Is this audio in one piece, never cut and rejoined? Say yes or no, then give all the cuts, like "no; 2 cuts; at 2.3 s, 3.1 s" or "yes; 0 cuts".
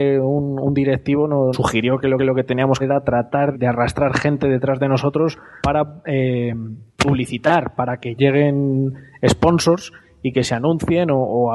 no; 7 cuts; at 1.5 s, 2.2 s, 2.8 s, 3.5 s, 5.6 s, 6.9 s, 8.2 s